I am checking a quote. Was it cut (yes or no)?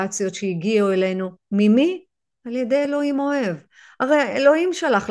no